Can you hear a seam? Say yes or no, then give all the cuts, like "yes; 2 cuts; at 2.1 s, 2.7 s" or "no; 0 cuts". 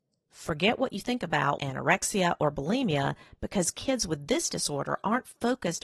yes; 1 cut; at 1.6 s